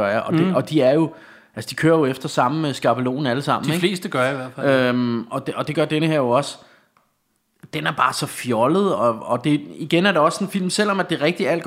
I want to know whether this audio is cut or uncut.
uncut